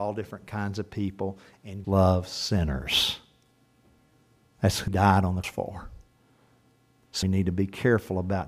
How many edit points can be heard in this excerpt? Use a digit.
4